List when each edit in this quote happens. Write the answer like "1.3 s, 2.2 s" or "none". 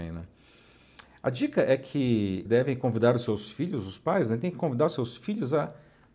2.5 s